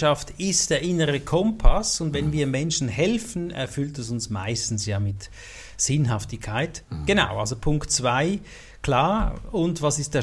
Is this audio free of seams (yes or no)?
yes